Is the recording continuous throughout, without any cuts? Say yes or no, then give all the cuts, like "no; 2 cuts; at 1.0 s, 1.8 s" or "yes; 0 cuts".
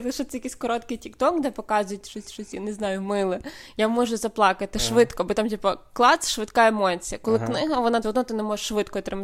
no; 2 cuts; at 2.2 s, 8.0 s